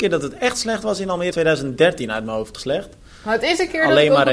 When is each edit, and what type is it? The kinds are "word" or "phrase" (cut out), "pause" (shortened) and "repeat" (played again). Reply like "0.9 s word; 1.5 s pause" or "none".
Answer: 1.3 s word; 2.5 s phrase